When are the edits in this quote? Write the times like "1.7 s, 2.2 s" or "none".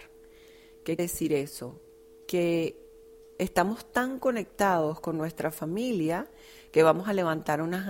1.0 s